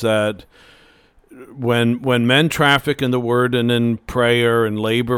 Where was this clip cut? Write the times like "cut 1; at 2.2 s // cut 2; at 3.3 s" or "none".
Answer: none